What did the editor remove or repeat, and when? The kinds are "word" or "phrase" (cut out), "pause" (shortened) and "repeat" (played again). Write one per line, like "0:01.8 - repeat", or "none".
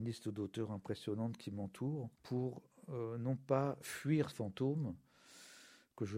0:02.1 - pause
0:04.3 - word